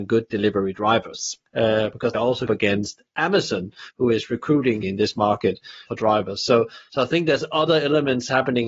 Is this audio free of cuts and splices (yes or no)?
no